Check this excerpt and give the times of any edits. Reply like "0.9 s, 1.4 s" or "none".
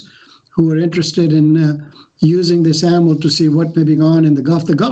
4.0 s